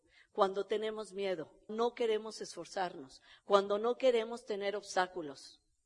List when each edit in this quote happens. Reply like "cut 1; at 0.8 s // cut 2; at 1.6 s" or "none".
cut 1; at 1.7 s